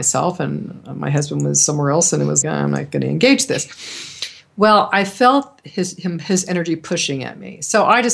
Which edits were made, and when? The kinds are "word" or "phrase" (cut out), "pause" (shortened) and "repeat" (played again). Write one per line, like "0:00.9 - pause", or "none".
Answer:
0:02.4 - word